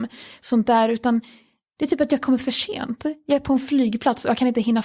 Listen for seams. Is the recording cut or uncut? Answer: uncut